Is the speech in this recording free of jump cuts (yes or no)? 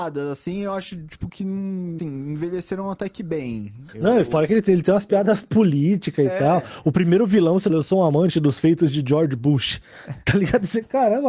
no